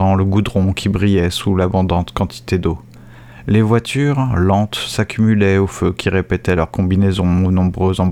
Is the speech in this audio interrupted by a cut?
no; 0 cuts

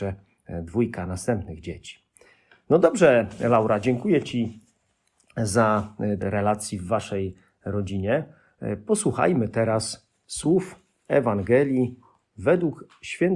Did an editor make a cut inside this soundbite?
yes; 1 cut; at 6.2 s

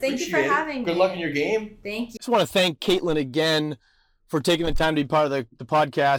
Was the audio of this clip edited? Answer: yes; 1 cut; at 2.2 s

